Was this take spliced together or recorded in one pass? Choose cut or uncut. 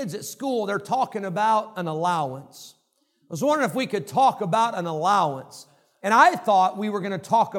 uncut